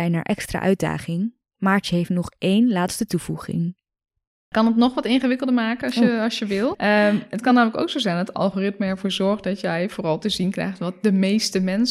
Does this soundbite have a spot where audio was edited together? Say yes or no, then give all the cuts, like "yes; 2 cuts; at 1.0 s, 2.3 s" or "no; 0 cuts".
no; 0 cuts